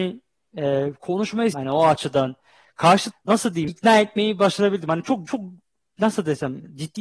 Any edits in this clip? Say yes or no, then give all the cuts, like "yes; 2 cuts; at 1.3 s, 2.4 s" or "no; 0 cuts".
yes; 4 cuts; at 1.5 s, 3.1 s, 3.7 s, 5.3 s